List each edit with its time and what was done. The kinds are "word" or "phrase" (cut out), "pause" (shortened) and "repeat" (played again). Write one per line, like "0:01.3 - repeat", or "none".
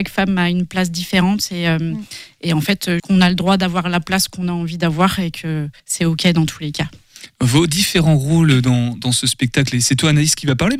0:03.0 - word
0:05.8 - pause